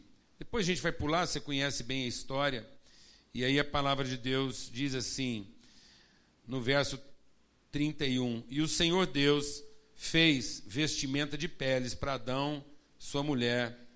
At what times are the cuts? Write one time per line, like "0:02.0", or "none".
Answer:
none